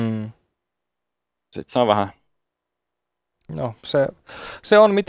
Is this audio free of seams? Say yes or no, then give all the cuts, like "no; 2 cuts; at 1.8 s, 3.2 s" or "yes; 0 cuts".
yes; 0 cuts